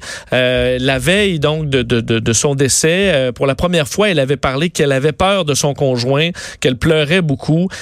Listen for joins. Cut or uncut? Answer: cut